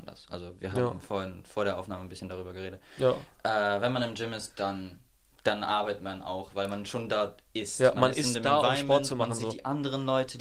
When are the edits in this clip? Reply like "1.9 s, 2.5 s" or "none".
none